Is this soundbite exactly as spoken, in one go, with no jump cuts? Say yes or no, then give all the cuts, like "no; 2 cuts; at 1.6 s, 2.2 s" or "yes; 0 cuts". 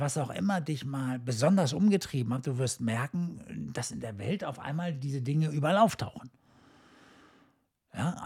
yes; 0 cuts